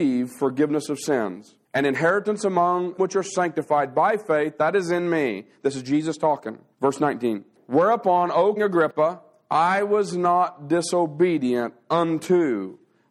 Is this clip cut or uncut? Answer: cut